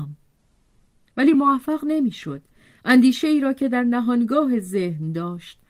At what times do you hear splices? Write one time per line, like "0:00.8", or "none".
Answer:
none